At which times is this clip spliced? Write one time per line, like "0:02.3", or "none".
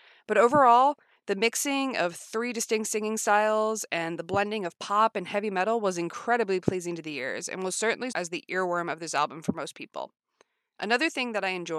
0:08.1